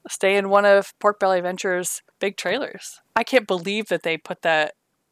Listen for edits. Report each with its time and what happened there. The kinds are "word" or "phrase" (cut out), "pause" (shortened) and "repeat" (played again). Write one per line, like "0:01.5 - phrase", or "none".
0:02.1 - pause
0:03.1 - pause